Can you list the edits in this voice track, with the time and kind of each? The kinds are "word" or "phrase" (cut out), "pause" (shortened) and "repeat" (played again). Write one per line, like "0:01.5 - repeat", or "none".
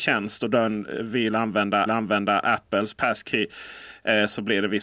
0:01.9 - repeat